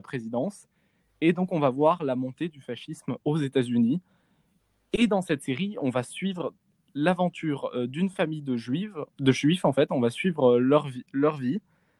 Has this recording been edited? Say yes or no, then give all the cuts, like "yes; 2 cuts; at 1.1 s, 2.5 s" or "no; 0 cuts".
no; 0 cuts